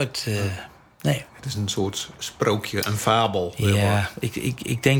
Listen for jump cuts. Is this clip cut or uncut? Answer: cut